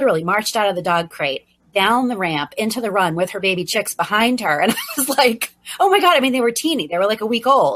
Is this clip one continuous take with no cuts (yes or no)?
yes